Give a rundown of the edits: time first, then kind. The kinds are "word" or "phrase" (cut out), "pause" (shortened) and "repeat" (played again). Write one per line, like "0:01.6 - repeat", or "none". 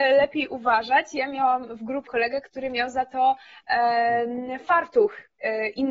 0:02.1 - word